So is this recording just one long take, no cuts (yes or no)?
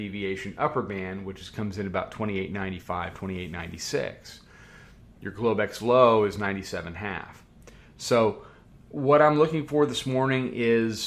no